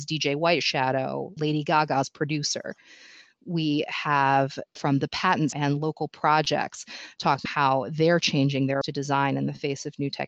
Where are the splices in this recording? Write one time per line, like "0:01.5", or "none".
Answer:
0:01.4
0:04.8
0:05.5
0:07.5
0:08.8